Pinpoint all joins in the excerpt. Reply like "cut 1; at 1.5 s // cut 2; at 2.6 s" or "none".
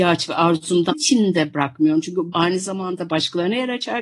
cut 1; at 0.9 s // cut 2; at 2.3 s